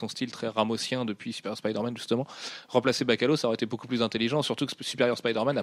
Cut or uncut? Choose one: uncut